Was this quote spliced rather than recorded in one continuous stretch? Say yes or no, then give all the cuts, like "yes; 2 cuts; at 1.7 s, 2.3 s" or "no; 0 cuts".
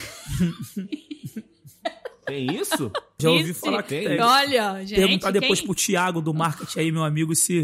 yes; 1 cut; at 3.2 s